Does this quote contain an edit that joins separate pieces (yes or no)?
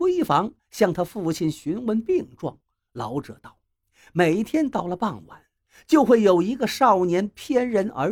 no